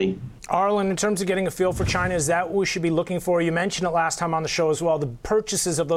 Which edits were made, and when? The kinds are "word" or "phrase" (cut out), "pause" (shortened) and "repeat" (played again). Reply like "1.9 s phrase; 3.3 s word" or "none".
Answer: none